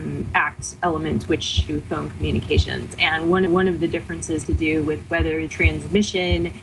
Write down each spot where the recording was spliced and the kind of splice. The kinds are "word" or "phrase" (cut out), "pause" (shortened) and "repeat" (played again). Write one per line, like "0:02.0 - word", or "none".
0:01.7 - phrase
0:03.5 - repeat
0:04.4 - word
0:05.5 - word